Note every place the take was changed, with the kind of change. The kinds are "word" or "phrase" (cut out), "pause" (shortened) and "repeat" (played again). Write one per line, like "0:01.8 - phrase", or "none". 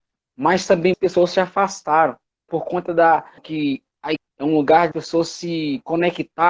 0:00.9 - word
0:02.5 - word
0:03.4 - word
0:04.2 - word
0:04.9 - word